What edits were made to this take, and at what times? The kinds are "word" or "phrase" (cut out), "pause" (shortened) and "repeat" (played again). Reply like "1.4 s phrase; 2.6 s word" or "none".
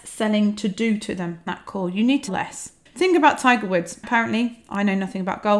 1.5 s word; 2.3 s word